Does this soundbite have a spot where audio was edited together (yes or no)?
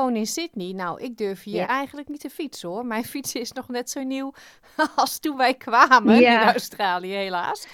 no